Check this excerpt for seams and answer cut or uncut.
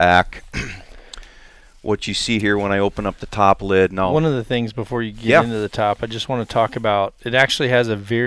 uncut